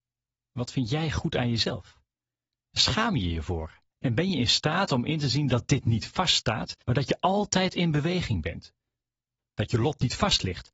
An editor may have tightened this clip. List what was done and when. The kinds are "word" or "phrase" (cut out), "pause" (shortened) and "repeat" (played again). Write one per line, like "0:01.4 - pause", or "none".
0:02.8 - word
0:03.9 - pause
0:06.8 - pause